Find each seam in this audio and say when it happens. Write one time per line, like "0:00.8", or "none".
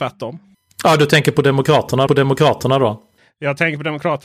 0:02.1